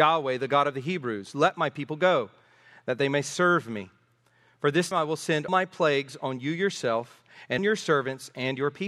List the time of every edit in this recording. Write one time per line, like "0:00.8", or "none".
0:04.9
0:05.5
0:07.6